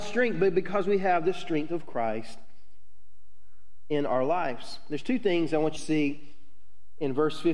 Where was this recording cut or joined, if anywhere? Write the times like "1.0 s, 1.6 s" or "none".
5.8 s